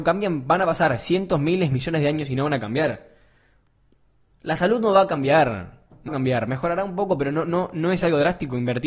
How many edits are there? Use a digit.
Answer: 1